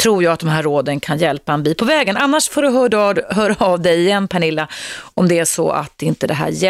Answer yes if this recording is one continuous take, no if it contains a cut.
yes